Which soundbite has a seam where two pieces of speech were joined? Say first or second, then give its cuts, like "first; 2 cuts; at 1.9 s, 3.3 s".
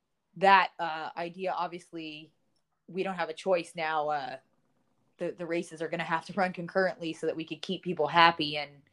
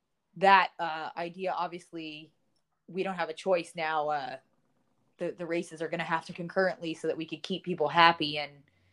second; 1 cut; at 6.3 s